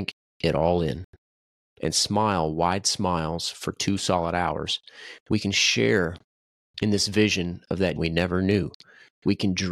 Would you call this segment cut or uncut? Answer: cut